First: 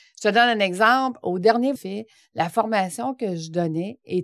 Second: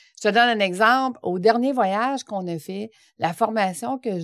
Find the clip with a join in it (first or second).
first